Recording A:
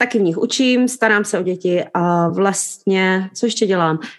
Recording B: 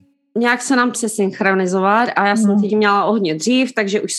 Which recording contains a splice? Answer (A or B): B